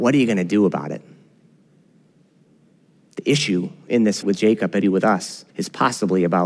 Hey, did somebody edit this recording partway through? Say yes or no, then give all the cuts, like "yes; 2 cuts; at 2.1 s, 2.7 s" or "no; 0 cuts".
yes; 3 cuts; at 4.2 s, 4.8 s, 5.5 s